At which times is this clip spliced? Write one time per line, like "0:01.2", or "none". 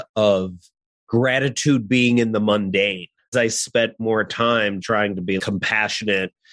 0:03.3
0:04.8
0:05.4